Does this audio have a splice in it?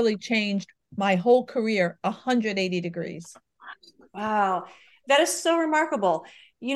no; 0 cuts

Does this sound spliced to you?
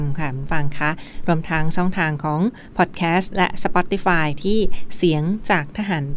no; 0 cuts

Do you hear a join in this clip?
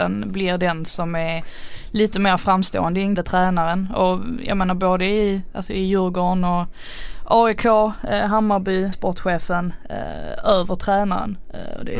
yes; 2 cuts; at 3.2 s, 8.9 s

